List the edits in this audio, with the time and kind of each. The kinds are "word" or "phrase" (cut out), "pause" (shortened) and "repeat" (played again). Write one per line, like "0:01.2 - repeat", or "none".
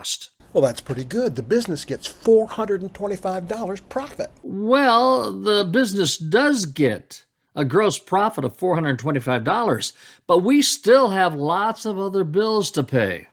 none